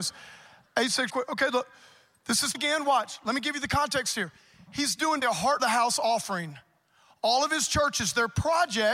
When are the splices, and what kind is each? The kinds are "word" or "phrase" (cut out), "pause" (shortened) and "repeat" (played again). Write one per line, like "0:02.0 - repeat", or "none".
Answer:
0:01.1 - word
0:02.5 - word
0:05.2 - word
0:05.6 - word